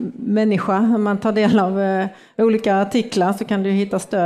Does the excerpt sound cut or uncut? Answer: uncut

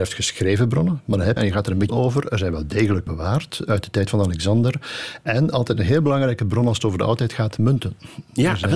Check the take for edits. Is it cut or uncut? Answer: cut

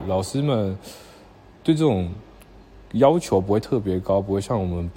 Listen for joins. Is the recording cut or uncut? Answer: uncut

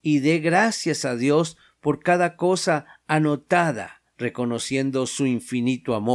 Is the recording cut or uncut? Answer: cut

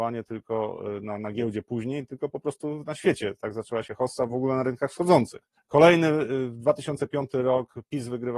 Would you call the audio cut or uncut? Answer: cut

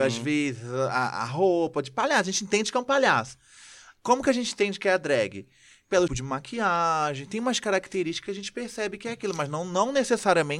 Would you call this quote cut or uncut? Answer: cut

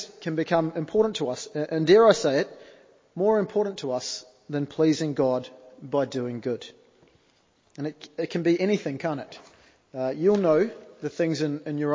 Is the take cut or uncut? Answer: uncut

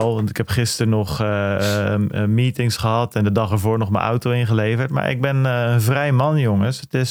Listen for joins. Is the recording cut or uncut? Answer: uncut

